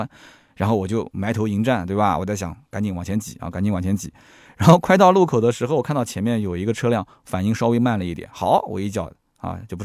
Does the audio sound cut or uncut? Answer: uncut